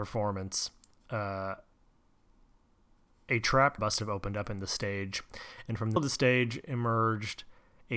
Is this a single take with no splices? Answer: no; 2 cuts; at 3.8 s, 6.0 s

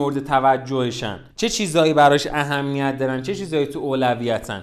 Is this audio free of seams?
no; 1 cut; at 1.3 s

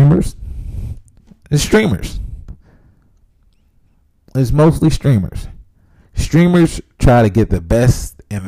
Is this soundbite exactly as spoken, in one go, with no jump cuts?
yes; 0 cuts

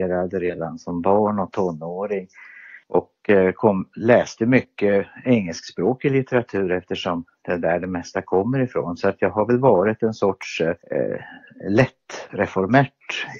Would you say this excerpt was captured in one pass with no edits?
no; 2 cuts; at 2.8 s, 10.8 s

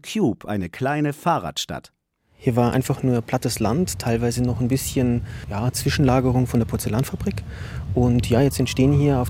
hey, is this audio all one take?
yes; 0 cuts

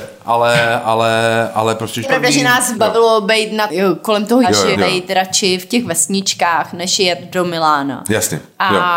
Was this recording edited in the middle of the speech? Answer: yes; 5 cuts; at 2.0 s, 2.7 s, 3.7 s, 4.4 s, 4.7 s

